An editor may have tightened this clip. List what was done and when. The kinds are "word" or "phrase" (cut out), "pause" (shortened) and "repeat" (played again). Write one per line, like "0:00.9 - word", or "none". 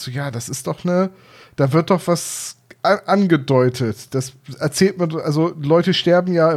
none